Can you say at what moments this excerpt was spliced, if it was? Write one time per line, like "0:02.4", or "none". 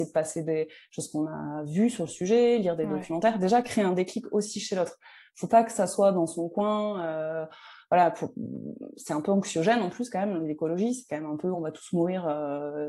none